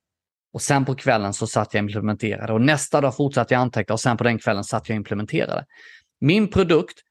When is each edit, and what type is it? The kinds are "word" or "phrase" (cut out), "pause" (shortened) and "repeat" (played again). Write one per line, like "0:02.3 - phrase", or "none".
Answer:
none

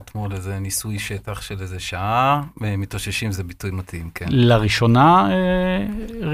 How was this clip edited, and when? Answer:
none

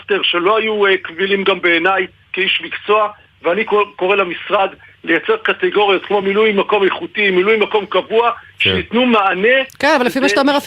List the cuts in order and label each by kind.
none

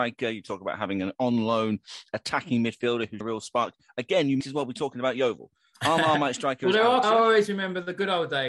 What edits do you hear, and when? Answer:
0:03.2 - word
0:04.4 - word
0:07.0 - word

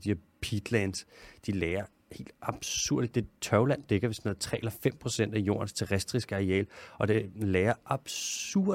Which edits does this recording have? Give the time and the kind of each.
none

